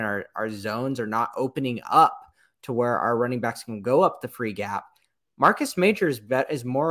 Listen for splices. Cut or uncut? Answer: uncut